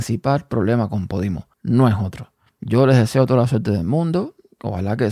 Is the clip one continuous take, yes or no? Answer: no